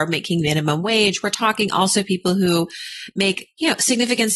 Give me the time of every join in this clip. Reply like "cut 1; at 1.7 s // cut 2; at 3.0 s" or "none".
none